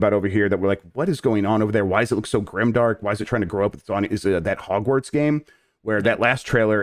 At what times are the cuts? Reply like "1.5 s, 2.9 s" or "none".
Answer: none